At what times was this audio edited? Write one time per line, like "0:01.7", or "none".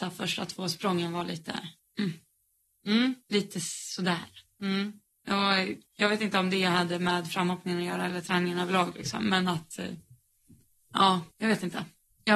0:01.8
0:03.2
0:05.9
0:11.3